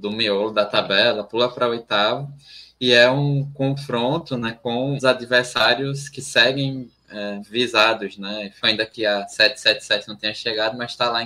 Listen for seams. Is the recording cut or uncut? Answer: cut